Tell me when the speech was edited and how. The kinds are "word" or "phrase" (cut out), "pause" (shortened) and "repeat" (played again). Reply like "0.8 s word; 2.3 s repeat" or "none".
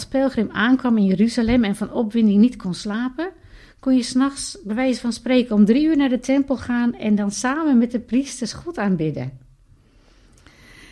none